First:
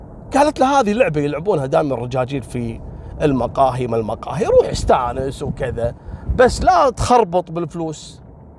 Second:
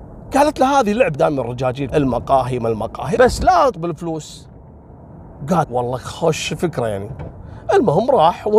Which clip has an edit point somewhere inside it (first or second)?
second